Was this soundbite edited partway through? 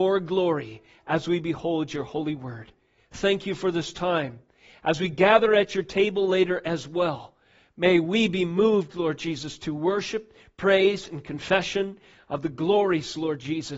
no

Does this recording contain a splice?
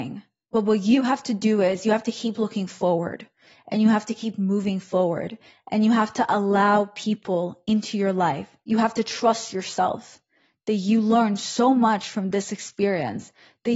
no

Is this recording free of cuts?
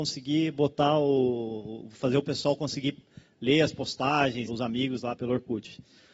no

